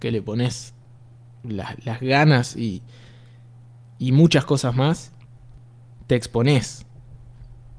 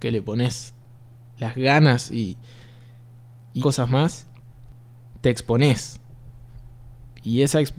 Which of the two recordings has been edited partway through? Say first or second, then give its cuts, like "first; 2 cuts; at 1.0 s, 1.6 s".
second; 2 cuts; at 1.4 s, 3.6 s